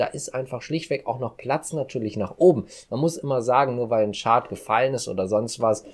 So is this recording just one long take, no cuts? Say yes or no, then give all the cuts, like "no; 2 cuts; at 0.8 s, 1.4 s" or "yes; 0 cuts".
yes; 0 cuts